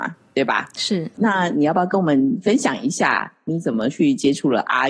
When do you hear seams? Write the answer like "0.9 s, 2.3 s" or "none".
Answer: 1.1 s